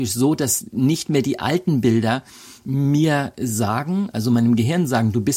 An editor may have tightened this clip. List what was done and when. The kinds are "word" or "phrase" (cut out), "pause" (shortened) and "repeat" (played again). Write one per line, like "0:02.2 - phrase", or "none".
none